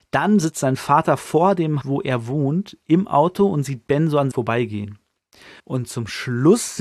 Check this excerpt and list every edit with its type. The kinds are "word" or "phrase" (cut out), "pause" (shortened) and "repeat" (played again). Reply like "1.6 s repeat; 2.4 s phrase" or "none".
1.8 s word; 4.3 s word; 5.6 s pause